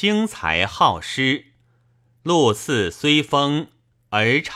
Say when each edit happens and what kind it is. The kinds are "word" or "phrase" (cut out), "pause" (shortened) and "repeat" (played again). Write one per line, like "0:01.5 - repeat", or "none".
none